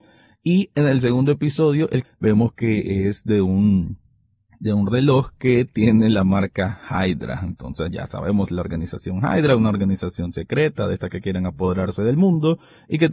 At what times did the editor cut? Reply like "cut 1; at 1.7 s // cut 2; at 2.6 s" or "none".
cut 1; at 2.0 s

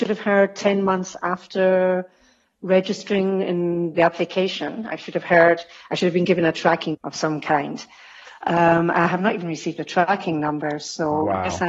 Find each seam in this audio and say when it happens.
cut 1; at 3.9 s // cut 2; at 6.9 s

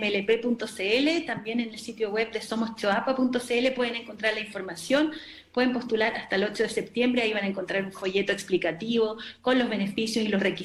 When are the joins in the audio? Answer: none

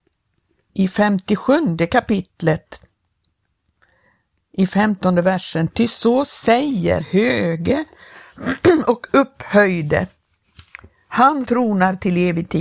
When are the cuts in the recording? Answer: cut 1; at 7.0 s // cut 2; at 11.5 s

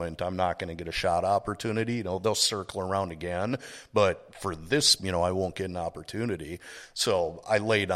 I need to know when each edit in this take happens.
cut 1; at 5.0 s

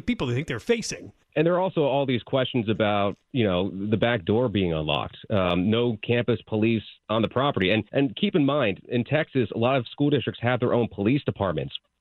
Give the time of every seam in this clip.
cut 1; at 1.2 s // cut 2; at 7.0 s // cut 3; at 7.9 s

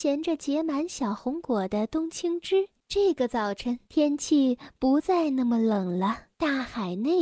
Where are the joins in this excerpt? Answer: cut 1; at 2.8 s // cut 2; at 3.8 s // cut 3; at 6.3 s

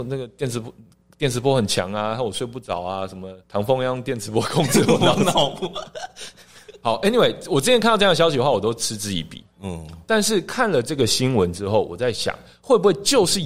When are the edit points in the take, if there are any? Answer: cut 1; at 3.4 s

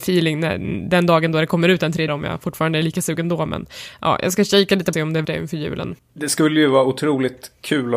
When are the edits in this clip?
cut 1; at 2.1 s // cut 2; at 4.9 s // cut 3; at 5.2 s // cut 4; at 6.0 s

